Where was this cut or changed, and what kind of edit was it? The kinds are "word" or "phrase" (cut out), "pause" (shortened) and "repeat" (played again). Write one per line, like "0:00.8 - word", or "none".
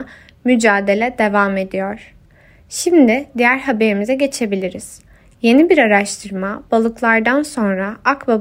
none